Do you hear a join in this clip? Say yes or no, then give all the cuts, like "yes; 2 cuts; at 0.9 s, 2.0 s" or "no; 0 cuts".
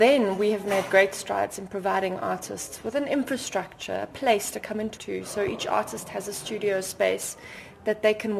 yes; 1 cut; at 5.0 s